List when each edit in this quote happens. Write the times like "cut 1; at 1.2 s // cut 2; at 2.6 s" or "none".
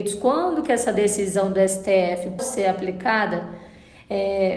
cut 1; at 2.4 s